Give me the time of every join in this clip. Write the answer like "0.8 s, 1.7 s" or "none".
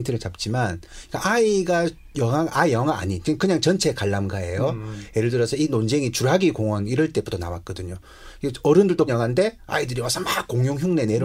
9.1 s